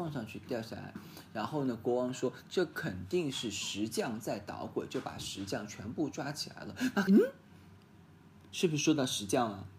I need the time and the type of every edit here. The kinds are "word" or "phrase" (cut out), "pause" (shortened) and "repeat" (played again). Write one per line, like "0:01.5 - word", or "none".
0:07.1 - phrase